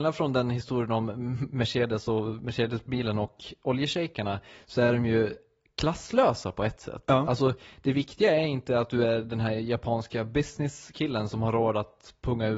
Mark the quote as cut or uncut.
uncut